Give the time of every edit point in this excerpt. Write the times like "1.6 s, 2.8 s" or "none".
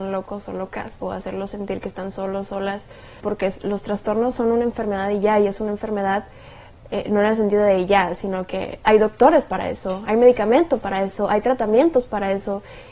3.2 s, 8.8 s